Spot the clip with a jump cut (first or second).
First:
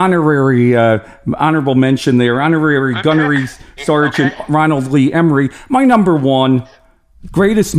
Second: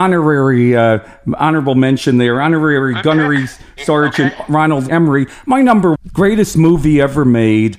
second